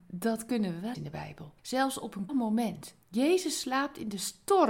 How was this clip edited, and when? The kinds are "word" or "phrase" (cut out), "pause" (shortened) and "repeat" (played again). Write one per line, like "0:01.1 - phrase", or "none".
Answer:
0:00.9 - word
0:01.6 - pause
0:02.3 - word
0:03.0 - pause